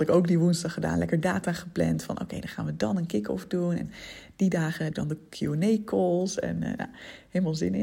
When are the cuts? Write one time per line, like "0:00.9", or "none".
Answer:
0:04.9

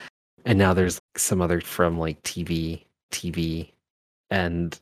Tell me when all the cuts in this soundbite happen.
0:01.0
0:01.6
0:03.1

